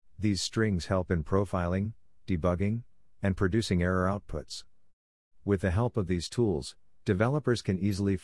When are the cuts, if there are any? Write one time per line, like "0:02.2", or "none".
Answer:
none